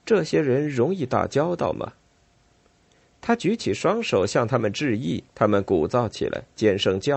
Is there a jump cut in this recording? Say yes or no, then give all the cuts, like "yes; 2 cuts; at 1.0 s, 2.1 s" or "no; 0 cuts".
yes; 1 cut; at 5.3 s